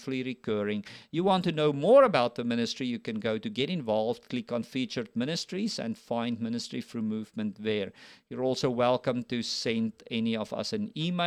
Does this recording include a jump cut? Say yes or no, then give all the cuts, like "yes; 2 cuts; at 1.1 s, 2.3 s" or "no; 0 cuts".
no; 0 cuts